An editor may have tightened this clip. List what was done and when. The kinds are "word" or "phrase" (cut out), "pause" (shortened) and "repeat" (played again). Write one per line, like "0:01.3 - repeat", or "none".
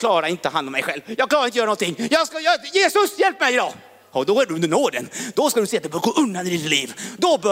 none